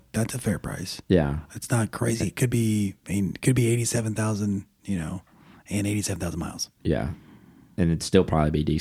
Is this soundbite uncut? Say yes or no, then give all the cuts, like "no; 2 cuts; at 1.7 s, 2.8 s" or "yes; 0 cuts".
yes; 0 cuts